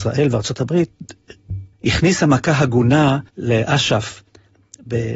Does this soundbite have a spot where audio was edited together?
yes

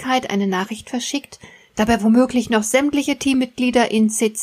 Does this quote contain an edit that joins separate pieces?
no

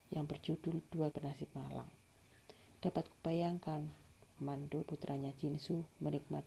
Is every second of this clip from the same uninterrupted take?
no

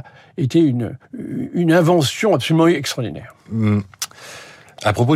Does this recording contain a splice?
yes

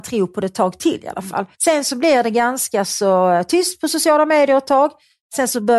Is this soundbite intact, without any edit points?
no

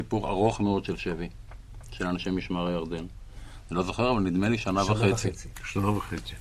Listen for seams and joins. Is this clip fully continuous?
yes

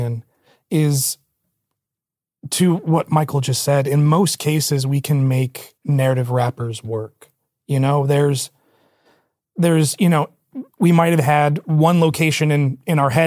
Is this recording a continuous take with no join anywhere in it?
no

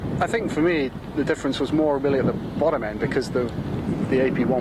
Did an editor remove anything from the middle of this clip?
no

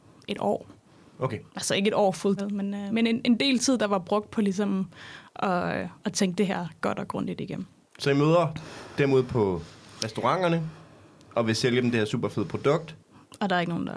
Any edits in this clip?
yes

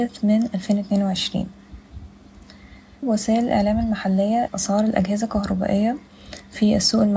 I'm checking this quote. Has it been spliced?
yes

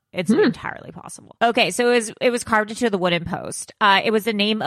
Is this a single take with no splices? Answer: yes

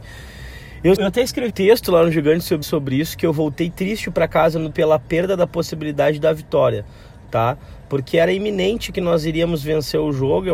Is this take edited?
yes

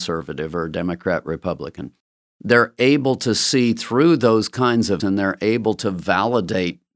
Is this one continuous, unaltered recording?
no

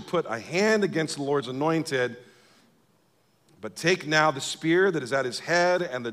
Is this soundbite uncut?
yes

